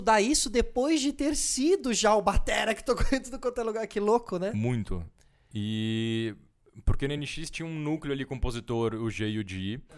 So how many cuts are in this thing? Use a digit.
0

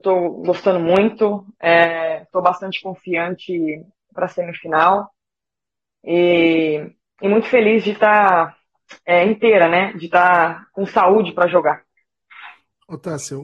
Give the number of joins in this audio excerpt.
0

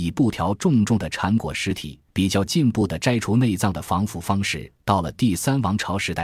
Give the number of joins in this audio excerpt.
1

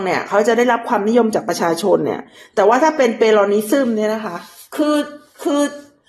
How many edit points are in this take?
0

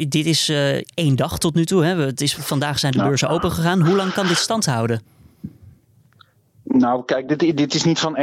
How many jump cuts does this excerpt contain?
0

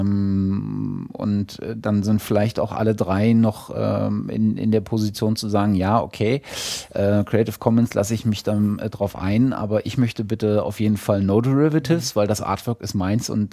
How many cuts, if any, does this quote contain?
0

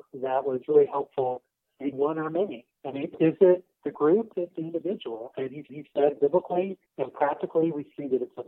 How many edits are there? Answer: 6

